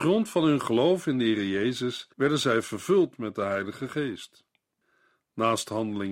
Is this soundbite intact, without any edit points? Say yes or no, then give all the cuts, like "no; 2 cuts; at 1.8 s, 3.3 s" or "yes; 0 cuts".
no; 1 cut; at 2.1 s